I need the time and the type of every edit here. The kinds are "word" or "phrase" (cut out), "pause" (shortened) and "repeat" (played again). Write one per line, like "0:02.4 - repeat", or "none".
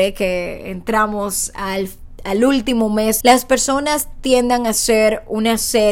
0:03.2 - phrase